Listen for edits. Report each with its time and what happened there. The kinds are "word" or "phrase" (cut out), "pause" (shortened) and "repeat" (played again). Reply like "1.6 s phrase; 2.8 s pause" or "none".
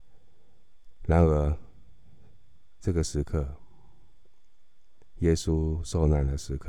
none